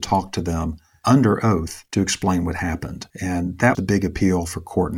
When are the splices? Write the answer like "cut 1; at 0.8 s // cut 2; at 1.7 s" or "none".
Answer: cut 1; at 1.9 s // cut 2; at 3.1 s // cut 3; at 3.7 s

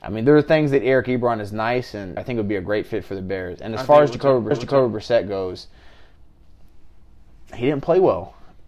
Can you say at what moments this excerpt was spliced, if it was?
cut 1; at 2.2 s // cut 2; at 4.5 s

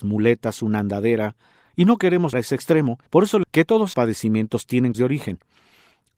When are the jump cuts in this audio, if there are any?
cut 1; at 2.3 s // cut 2; at 3.1 s // cut 3; at 3.4 s // cut 4; at 3.9 s // cut 5; at 4.9 s

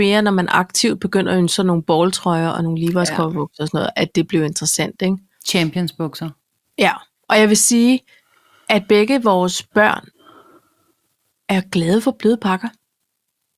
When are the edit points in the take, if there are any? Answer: none

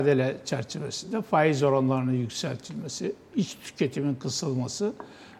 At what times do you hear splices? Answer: none

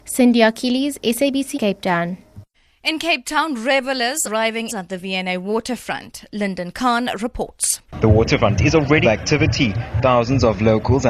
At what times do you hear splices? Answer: cut 1; at 1.5 s // cut 2; at 2.5 s // cut 3; at 4.2 s // cut 4; at 4.7 s // cut 5; at 7.9 s // cut 6; at 8.6 s // cut 7; at 9.0 s

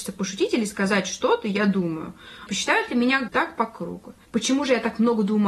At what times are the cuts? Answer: cut 1; at 2.5 s // cut 2; at 3.3 s

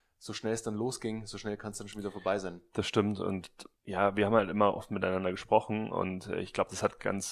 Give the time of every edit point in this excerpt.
cut 1; at 3.8 s

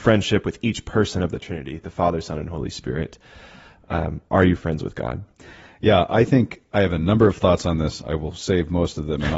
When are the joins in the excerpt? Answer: none

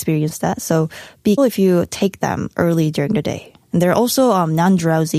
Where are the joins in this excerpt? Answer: cut 1; at 1.4 s

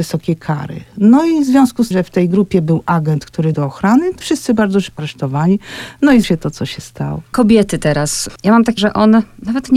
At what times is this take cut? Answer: cut 1; at 1.9 s // cut 2; at 3.5 s // cut 3; at 4.2 s // cut 4; at 5.0 s // cut 5; at 6.2 s // cut 6; at 8.8 s

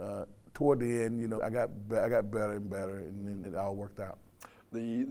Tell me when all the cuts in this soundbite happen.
cut 1; at 1.4 s // cut 2; at 3.4 s

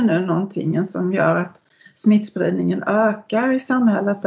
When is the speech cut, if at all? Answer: none

